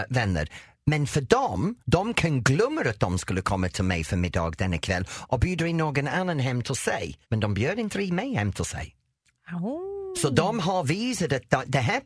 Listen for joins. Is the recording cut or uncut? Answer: cut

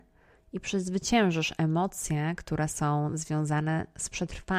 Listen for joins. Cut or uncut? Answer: uncut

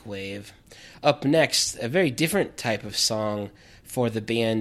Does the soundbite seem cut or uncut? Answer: uncut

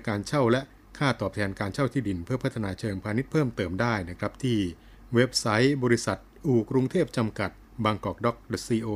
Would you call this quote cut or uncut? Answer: cut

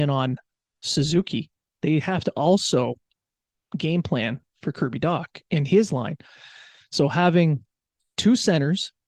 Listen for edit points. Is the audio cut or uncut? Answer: uncut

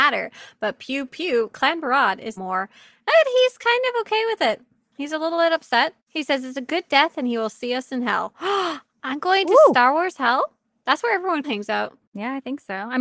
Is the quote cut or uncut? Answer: cut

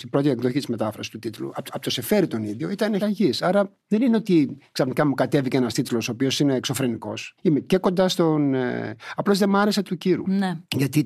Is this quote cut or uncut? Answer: cut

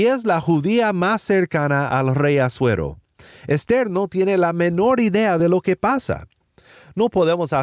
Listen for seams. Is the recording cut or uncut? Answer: uncut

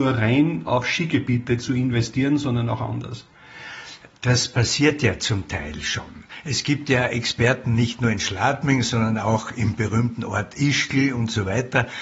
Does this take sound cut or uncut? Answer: uncut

